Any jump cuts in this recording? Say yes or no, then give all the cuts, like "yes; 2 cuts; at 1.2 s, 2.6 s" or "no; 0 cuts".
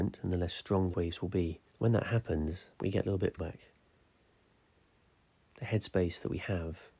yes; 4 cuts; at 0.9 s, 1.7 s, 2.7 s, 3.4 s